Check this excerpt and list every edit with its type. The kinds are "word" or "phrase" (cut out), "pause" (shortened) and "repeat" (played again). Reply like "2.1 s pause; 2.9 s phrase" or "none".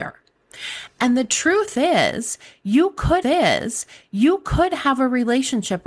3.2 s repeat